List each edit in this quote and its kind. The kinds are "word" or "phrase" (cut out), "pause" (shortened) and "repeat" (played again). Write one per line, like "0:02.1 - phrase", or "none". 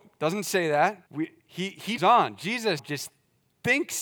0:01.1 - pause
0:02.0 - phrase
0:02.8 - word